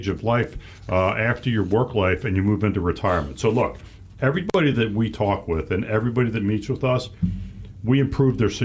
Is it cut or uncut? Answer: uncut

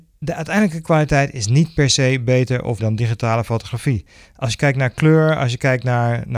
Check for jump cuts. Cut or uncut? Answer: cut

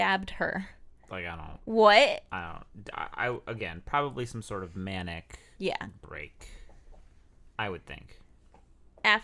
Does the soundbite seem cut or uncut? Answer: cut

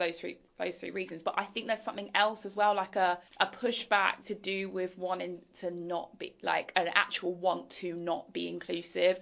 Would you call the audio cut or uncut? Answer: cut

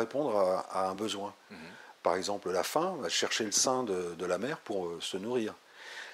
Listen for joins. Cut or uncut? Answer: uncut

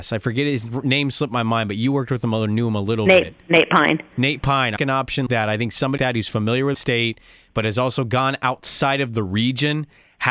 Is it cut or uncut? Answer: cut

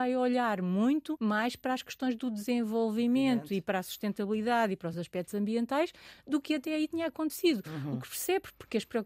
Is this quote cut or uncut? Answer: uncut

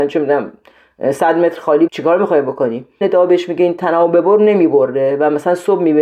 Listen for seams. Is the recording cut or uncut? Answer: cut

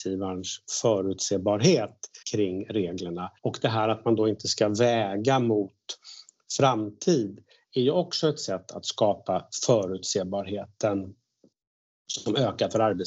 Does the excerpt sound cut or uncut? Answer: cut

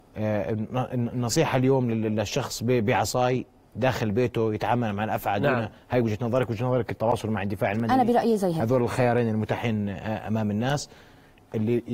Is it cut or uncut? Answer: uncut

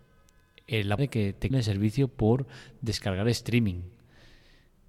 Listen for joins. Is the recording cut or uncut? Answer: cut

